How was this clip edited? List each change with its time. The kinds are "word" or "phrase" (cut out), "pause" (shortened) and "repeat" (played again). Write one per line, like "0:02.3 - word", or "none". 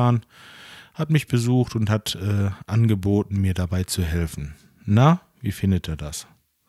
none